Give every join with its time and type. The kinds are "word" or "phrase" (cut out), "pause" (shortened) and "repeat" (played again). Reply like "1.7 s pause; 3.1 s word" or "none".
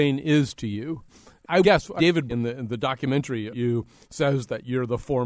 1.6 s word; 2.0 s word; 2.3 s word; 3.5 s word